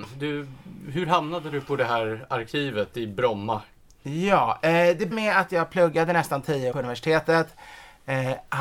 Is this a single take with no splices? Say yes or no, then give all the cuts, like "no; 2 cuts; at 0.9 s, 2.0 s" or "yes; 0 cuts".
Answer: no; 2 cuts; at 5.1 s, 6.7 s